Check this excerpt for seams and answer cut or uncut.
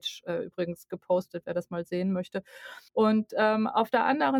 cut